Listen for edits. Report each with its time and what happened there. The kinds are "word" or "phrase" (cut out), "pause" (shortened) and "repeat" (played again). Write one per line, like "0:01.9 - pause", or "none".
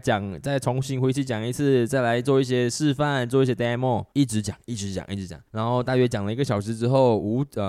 0:04.1 - pause
0:05.5 - pause